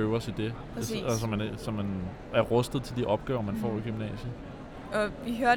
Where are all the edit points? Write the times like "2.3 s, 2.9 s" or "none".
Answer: 2.3 s